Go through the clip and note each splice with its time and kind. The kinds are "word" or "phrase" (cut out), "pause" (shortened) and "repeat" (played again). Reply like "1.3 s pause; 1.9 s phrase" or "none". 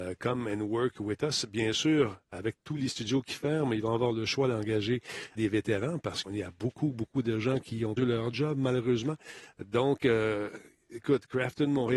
5.3 s word; 6.2 s word; 8.0 s word